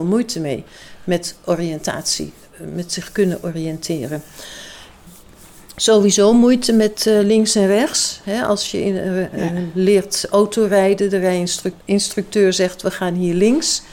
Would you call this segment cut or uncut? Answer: cut